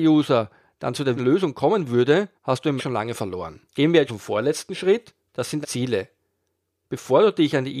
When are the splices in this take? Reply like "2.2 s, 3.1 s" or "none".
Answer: 1.2 s, 2.4 s, 2.8 s, 3.7 s, 4.1 s, 5.2 s, 5.6 s